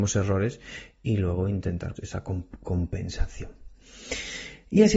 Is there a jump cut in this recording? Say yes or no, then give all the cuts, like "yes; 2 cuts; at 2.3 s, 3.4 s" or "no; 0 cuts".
yes; 1 cut; at 2.0 s